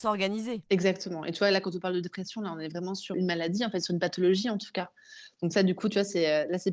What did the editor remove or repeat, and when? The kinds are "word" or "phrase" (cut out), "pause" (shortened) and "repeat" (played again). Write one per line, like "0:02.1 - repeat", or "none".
0:03.1 - word